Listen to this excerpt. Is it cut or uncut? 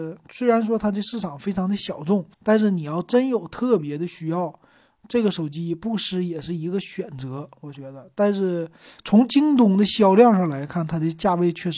cut